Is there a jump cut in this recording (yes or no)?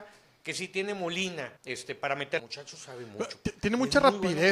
yes